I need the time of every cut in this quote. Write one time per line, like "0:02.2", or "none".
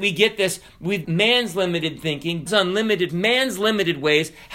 0:01.0
0:02.5
0:03.1